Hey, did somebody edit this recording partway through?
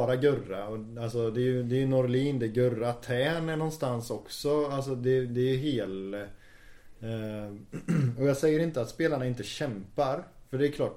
no; 0 cuts

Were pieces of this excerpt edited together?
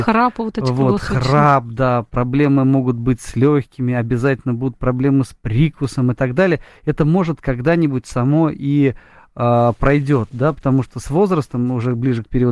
no; 0 cuts

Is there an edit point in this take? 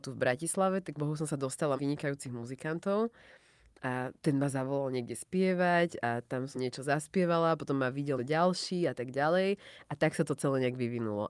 yes; 5 cuts; at 1.0 s, 1.8 s, 4.2 s, 6.5 s, 8.2 s

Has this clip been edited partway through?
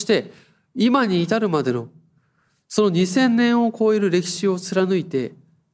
no; 0 cuts

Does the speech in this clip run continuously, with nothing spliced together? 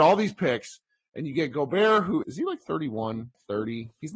no; 1 cut; at 2.2 s

